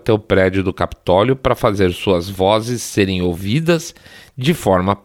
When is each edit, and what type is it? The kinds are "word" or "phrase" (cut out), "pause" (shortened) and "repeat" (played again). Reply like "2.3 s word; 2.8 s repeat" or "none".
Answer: none